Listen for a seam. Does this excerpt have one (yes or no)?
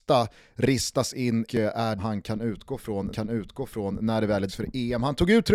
yes